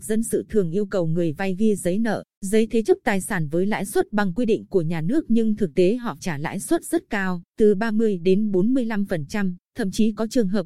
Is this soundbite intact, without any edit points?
no; 4 cuts; at 2.3 s, 6.2 s, 7.5 s, 9.6 s

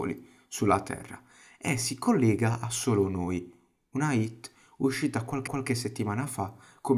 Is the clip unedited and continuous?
no; 1 cut; at 5.5 s

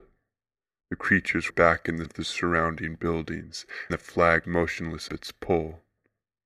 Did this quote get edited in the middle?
yes; 5 cuts; at 1.5 s, 2.0 s, 3.9 s, 4.4 s, 5.1 s

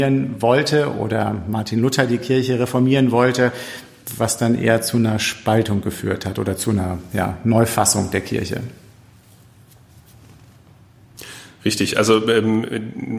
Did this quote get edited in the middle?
no; 0 cuts

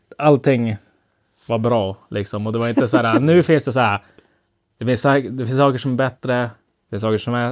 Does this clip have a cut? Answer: no; 0 cuts

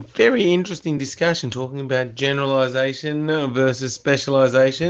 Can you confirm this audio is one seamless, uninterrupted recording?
yes; 0 cuts

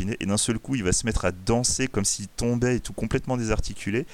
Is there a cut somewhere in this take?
no; 0 cuts

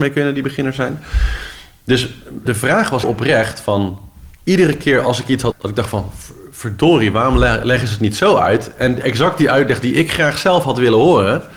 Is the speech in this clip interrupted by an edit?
yes; 3 cuts; at 2.5 s, 3.0 s, 5.5 s

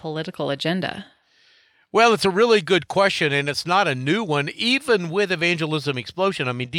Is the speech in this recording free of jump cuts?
yes; 0 cuts

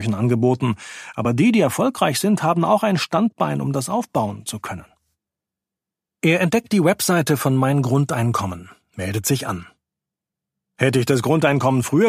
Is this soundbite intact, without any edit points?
yes; 0 cuts

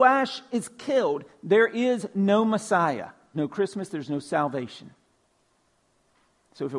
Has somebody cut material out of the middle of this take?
yes; 1 cut; at 3.3 s

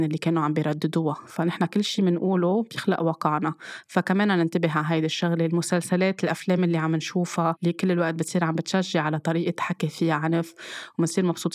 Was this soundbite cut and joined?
no; 0 cuts

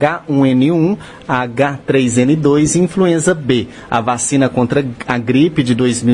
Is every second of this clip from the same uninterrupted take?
yes; 0 cuts

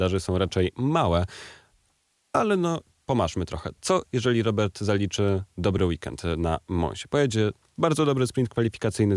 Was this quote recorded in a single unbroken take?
yes; 0 cuts

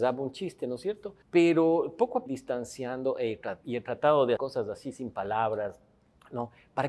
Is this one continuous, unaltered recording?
no; 4 cuts; at 1.2 s, 2.3 s, 3.6 s, 4.4 s

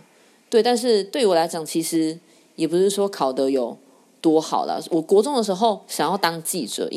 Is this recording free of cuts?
yes; 0 cuts

